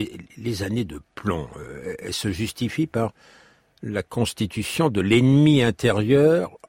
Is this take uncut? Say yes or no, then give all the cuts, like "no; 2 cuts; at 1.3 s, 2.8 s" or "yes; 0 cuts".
yes; 0 cuts